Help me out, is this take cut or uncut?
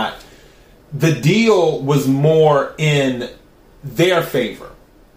uncut